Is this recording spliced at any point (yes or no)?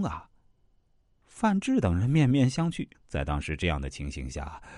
yes